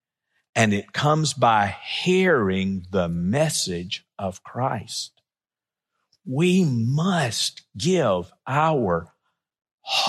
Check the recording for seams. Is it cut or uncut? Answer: uncut